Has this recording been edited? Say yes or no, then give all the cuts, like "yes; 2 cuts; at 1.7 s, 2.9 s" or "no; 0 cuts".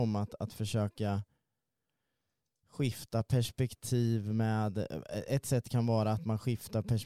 no; 0 cuts